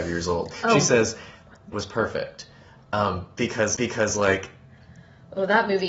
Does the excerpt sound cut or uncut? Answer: cut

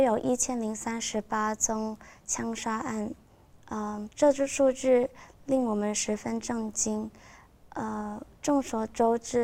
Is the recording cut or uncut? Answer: cut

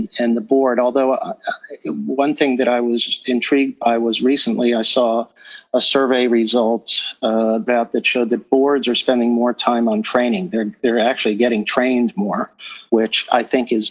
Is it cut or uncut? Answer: cut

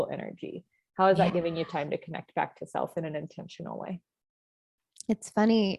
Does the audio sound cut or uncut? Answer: uncut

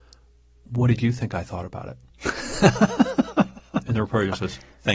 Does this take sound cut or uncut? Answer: uncut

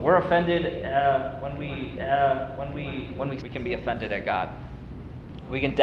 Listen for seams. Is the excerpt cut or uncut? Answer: cut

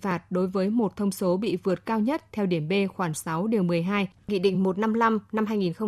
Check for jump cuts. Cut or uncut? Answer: uncut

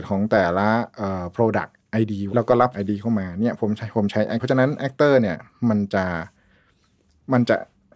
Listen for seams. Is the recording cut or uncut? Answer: cut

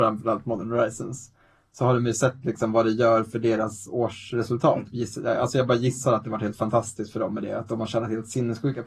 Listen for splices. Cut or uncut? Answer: uncut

